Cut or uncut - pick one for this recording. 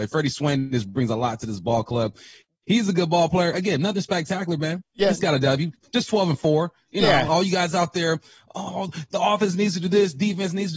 uncut